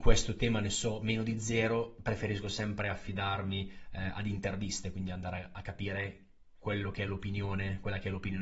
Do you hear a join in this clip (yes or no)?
no